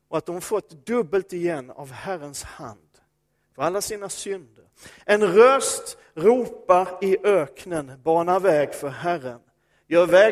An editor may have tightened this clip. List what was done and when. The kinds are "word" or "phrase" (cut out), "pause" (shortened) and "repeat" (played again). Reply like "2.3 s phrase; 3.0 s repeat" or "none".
none